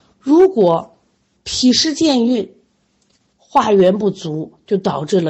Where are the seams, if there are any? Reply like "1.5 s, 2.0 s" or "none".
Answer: none